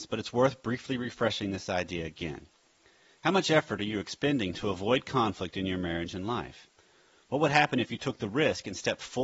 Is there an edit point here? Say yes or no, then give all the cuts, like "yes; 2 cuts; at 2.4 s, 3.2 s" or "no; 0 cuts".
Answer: no; 0 cuts